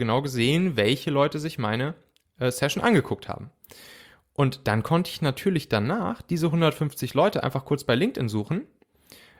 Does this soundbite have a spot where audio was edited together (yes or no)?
no